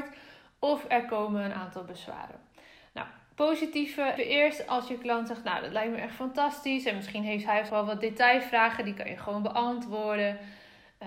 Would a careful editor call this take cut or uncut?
cut